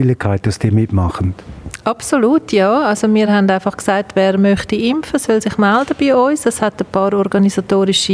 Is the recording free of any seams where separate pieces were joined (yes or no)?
yes